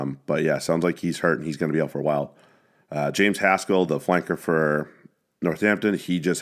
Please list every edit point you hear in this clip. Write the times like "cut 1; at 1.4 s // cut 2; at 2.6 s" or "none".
none